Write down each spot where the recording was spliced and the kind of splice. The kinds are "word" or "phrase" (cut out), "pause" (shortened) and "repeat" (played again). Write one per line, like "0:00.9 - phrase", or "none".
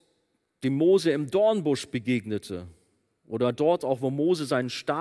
none